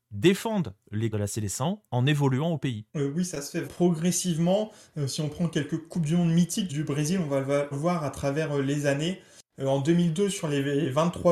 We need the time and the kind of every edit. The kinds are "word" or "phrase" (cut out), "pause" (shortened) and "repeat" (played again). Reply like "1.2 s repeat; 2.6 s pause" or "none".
1.1 s word; 1.8 s pause; 2.9 s pause; 3.7 s word; 6.7 s word; 7.7 s word